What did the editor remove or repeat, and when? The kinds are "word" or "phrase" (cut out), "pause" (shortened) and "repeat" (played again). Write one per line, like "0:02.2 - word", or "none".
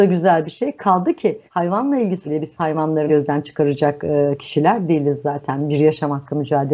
0:01.5 - pause
0:02.2 - word
0:03.1 - word